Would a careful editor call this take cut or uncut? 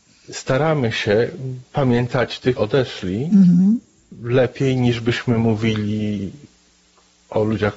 cut